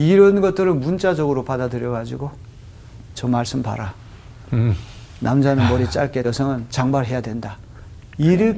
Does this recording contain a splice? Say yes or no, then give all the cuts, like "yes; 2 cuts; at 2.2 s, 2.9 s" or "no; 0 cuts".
yes; 2 cuts; at 3.2 s, 6.2 s